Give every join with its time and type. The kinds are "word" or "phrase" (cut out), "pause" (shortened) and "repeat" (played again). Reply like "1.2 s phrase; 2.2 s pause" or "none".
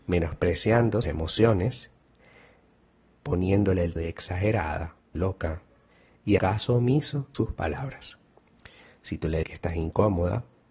1.0 s word; 4.0 s word; 5.1 s word; 6.4 s word; 7.3 s word; 9.4 s word